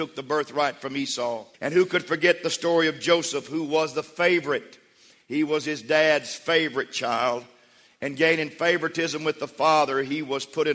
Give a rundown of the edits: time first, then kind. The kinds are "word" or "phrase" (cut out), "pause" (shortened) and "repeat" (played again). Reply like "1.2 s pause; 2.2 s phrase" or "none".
1.5 s pause